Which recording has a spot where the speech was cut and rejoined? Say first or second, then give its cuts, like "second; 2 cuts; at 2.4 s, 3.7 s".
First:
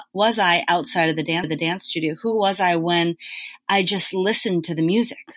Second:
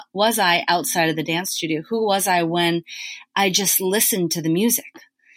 first; 1 cut; at 1.4 s